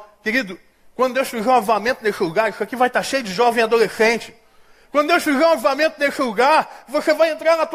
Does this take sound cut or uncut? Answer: uncut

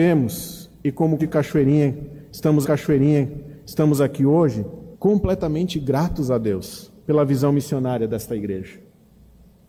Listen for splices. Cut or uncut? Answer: cut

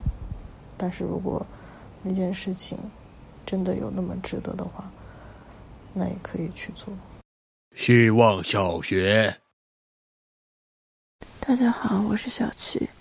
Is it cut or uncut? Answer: cut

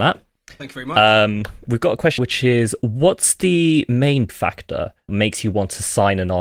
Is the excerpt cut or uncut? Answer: cut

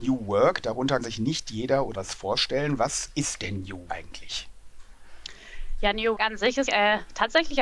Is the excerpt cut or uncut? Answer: cut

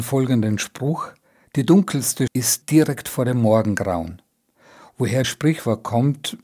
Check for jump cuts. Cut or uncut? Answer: cut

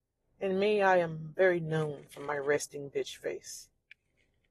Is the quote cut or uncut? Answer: uncut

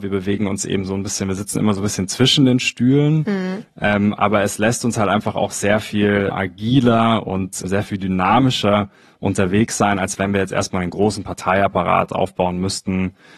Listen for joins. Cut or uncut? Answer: uncut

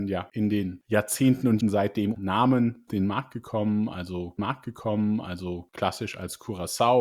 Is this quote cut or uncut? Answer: cut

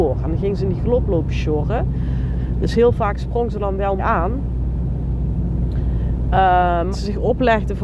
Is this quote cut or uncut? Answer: cut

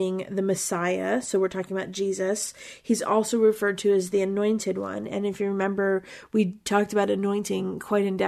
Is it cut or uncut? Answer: uncut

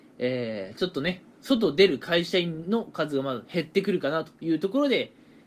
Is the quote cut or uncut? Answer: cut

